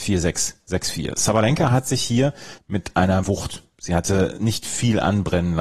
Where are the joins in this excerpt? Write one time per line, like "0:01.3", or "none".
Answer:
0:02.6
0:03.2